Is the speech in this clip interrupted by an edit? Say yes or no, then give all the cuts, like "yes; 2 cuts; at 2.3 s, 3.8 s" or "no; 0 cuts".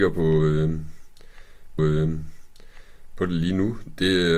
yes; 1 cut; at 1.8 s